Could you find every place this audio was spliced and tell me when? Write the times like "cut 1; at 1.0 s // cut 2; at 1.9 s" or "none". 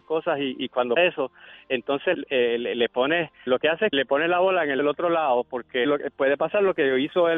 cut 1; at 1.0 s // cut 2; at 2.1 s // cut 3; at 3.5 s // cut 4; at 3.9 s // cut 5; at 4.8 s // cut 6; at 5.8 s